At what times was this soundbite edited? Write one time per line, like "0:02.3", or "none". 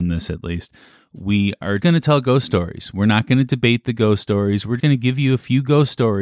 0:01.8
0:04.8